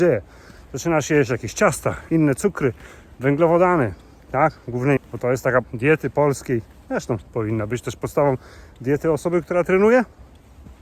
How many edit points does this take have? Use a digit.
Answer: 3